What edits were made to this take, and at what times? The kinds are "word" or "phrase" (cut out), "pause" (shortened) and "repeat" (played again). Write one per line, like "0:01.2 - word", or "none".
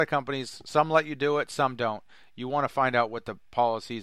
none